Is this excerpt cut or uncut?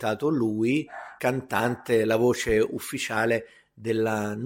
cut